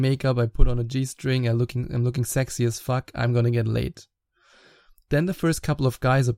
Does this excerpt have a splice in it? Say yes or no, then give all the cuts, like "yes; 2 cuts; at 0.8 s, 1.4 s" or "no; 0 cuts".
no; 0 cuts